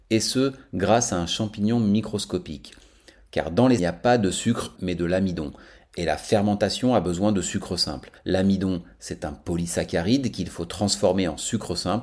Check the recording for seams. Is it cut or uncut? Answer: cut